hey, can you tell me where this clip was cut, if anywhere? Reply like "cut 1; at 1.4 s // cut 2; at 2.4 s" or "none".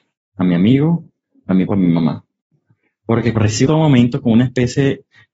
cut 1; at 1.7 s // cut 2; at 3.3 s // cut 3; at 3.7 s